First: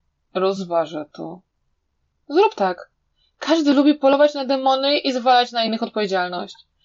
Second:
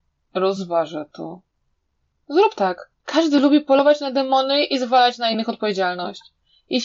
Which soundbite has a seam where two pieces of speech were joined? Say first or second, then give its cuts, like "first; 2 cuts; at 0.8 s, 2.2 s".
second; 1 cut; at 3.0 s